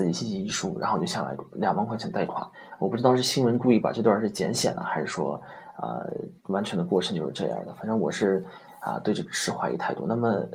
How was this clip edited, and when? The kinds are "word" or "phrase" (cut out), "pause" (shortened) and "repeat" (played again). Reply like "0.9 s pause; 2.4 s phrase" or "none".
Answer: 6.4 s pause